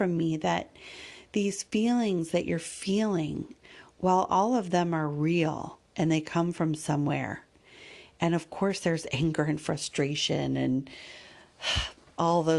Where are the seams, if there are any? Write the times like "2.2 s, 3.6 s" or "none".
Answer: 5.8 s